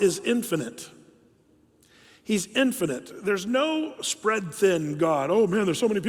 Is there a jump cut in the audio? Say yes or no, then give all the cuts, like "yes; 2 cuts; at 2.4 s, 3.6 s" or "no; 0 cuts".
no; 0 cuts